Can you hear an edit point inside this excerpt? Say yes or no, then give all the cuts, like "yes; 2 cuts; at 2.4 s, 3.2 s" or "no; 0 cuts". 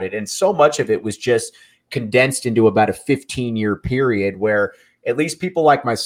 no; 0 cuts